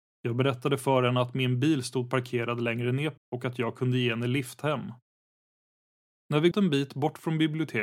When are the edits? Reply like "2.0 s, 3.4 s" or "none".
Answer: 3.2 s, 6.5 s